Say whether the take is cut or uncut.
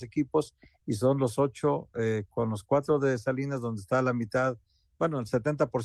uncut